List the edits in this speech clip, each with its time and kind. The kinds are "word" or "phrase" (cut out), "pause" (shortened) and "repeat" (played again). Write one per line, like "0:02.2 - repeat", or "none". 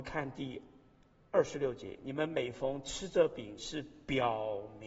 0:03.6 - phrase